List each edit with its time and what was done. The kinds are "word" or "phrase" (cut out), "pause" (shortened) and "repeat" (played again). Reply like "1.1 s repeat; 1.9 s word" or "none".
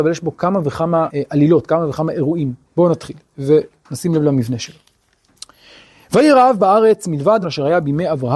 1.1 s word; 2.6 s pause; 7.4 s phrase